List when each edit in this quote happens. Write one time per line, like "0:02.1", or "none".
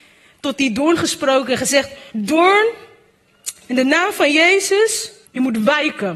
0:02.1
0:05.3